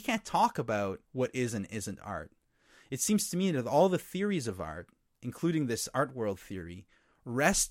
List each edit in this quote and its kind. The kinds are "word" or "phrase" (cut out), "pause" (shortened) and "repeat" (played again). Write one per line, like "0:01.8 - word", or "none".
0:01.0 - pause

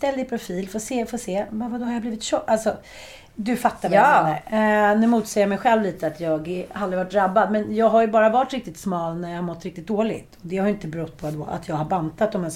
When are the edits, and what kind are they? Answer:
none

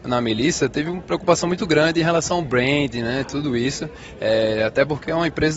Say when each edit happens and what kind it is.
none

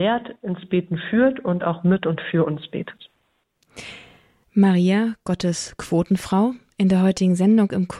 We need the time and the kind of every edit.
none

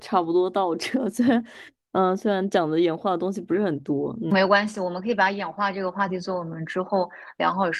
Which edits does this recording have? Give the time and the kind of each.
none

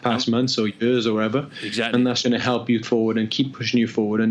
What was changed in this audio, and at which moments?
0:02.2 - word
0:02.8 - phrase

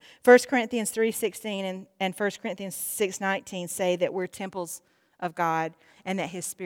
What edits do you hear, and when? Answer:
none

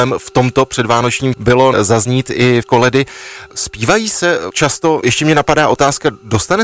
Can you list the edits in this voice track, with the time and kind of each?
0:01.3 - word
0:01.7 - word
0:02.6 - word
0:04.5 - word
0:05.0 - word

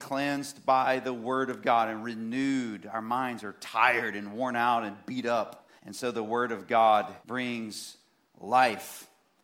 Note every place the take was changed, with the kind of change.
0:05.8 - pause
0:07.2 - pause

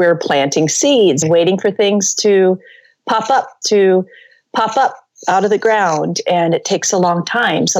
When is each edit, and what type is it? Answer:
0:01.2 - word
0:03.6 - repeat

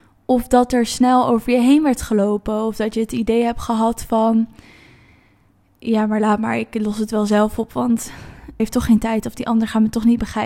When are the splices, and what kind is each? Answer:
0:08.6 - phrase

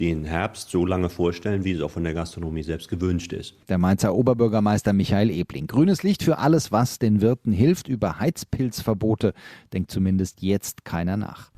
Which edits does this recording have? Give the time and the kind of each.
none

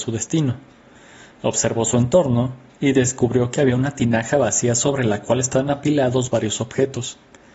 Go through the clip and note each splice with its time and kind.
none

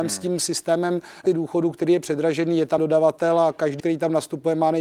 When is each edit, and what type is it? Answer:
0:01.3 - word
0:02.8 - word
0:03.8 - word

